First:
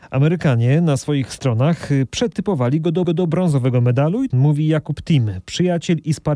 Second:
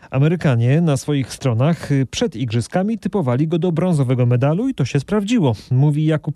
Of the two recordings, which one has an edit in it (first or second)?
first